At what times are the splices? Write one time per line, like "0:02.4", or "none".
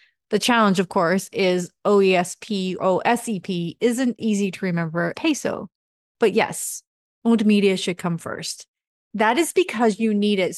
0:02.8
0:04.2
0:05.1